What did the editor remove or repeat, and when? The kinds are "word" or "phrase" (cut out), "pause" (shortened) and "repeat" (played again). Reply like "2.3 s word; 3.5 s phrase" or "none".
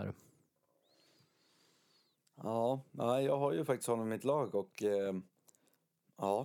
none